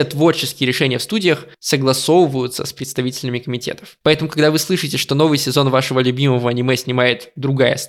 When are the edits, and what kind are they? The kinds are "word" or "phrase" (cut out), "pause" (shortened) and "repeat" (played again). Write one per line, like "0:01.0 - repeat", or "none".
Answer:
0:01.5 - pause
0:04.0 - pause